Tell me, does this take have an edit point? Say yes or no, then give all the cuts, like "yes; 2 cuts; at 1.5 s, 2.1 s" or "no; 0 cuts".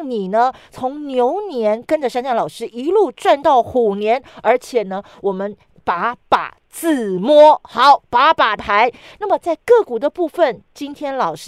yes; 1 cut; at 8.6 s